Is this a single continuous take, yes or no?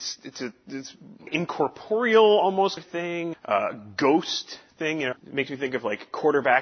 no